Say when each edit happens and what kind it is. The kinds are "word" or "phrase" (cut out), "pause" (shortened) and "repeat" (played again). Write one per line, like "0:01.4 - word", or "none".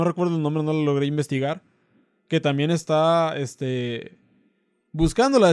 none